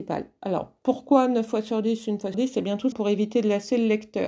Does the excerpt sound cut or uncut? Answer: cut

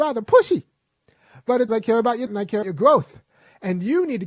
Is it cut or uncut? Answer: cut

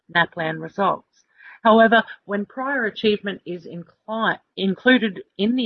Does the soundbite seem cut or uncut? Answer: uncut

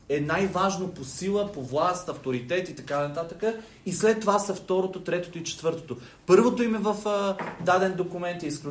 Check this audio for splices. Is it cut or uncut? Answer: uncut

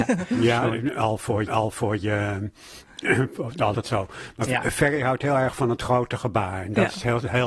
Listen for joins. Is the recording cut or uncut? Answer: cut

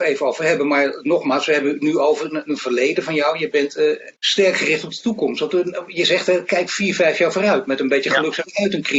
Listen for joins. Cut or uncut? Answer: cut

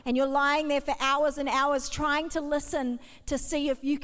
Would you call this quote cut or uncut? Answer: uncut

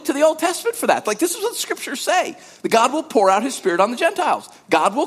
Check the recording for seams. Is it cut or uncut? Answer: uncut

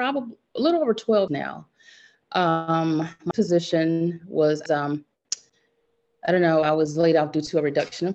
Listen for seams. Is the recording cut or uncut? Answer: cut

